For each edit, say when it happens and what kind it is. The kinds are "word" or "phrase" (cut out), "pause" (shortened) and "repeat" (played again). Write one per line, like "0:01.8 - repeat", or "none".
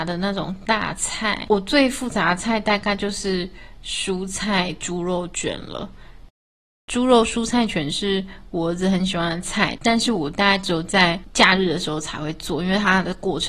none

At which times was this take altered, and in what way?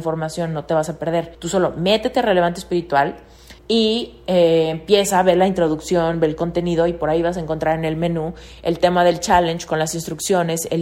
0:01.3 - pause
0:03.6 - pause

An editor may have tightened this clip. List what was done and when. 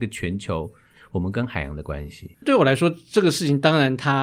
0:02.3 - pause

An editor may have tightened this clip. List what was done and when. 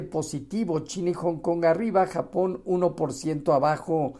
none

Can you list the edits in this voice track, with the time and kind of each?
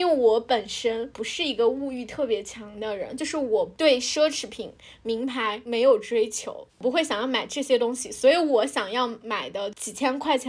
0:06.7 - pause

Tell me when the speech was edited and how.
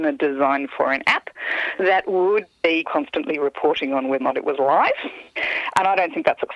0:02.8 - phrase
0:04.2 - word

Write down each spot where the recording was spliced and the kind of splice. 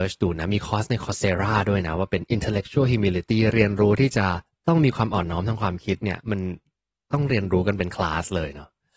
none

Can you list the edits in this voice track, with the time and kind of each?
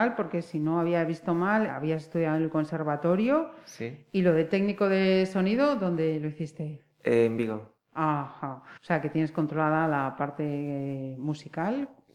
0:01.7 - word
0:08.8 - pause

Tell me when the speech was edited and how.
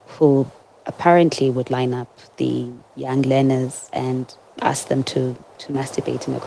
0:02.8 - pause

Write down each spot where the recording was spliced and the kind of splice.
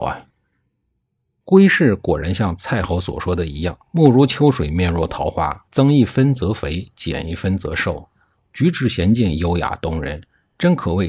0:03.8 - pause
0:05.7 - pause

